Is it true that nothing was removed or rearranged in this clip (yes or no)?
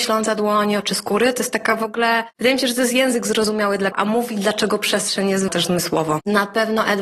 no